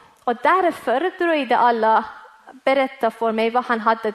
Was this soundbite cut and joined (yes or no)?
no